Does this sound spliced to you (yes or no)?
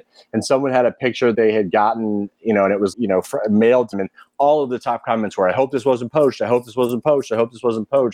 yes